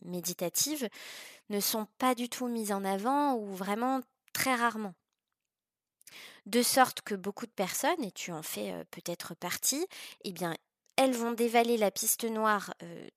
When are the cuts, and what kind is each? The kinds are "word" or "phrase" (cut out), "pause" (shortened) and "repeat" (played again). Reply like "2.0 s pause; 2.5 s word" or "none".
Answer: none